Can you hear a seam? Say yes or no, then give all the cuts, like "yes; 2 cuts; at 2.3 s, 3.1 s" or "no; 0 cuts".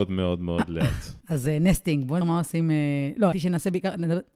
yes; 3 cuts; at 1.2 s, 2.2 s, 3.3 s